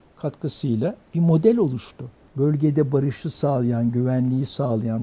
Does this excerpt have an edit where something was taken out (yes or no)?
no